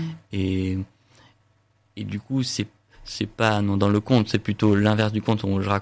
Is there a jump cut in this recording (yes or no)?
no